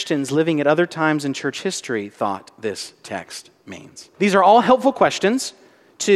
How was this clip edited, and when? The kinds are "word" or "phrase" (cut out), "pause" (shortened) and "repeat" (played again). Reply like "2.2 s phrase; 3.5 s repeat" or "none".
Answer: 4.1 s pause